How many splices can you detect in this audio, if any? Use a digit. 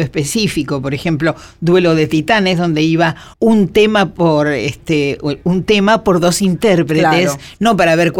1